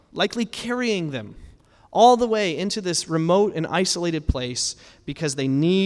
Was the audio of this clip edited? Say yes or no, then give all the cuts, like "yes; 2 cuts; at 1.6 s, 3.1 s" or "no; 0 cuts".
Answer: no; 0 cuts